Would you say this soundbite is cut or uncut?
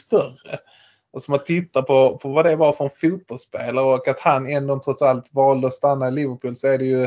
uncut